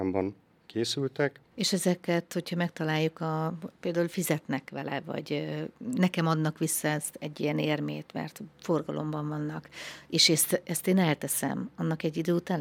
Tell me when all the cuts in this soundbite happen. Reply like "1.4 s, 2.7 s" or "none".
1.4 s